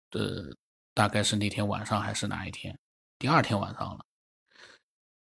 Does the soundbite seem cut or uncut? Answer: uncut